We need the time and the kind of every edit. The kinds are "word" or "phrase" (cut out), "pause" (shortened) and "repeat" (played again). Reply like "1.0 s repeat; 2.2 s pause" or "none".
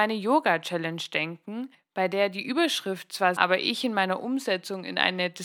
1.7 s pause; 3.4 s phrase